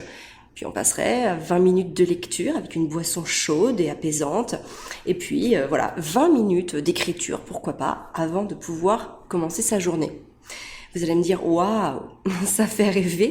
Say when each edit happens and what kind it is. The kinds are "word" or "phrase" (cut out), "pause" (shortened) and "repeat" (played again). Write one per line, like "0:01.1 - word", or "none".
none